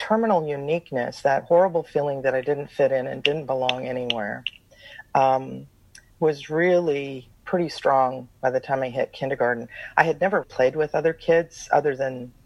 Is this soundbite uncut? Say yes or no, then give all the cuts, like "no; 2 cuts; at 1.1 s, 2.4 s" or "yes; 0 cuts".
no; 2 cuts; at 7.3 s, 10.4 s